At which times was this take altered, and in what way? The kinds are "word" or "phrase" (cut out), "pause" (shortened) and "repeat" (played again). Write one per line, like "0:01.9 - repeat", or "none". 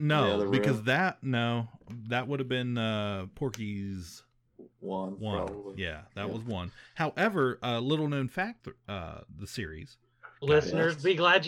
0:08.6 - phrase